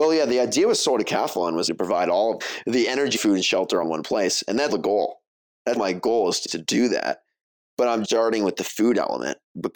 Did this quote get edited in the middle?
yes; 8 cuts; at 1.7 s, 2.4 s, 3.2 s, 3.8 s, 4.7 s, 5.8 s, 6.5 s, 8.0 s

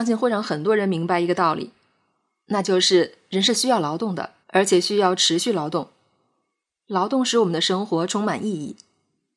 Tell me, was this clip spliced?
yes; 1 cut; at 4.4 s

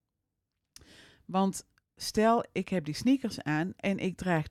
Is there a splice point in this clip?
no; 0 cuts

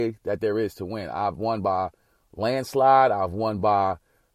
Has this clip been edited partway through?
no; 0 cuts

